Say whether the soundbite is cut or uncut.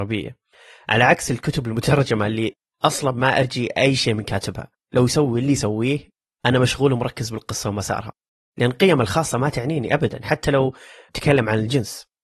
uncut